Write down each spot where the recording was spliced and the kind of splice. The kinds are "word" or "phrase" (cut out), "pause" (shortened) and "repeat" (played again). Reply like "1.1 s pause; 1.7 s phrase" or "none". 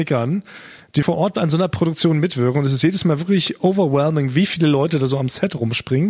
1.0 s word